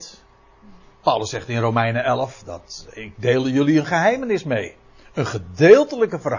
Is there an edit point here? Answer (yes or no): no